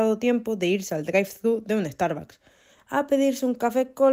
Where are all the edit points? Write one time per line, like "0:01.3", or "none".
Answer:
none